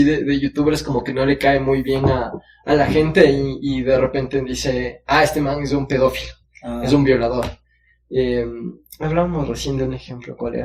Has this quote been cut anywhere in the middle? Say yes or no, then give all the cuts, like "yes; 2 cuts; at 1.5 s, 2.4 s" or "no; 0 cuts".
no; 0 cuts